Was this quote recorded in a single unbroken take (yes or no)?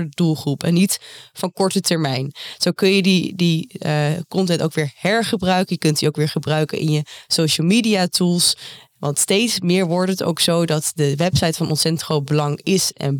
yes